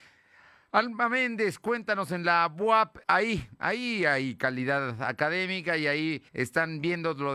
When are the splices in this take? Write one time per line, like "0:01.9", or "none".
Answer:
0:03.0
0:06.3